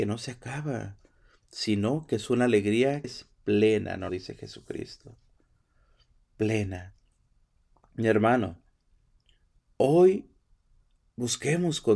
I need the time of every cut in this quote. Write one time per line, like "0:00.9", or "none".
0:03.0
0:04.1